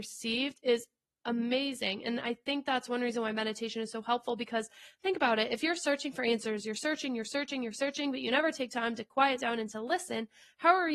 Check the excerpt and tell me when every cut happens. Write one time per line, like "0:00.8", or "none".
none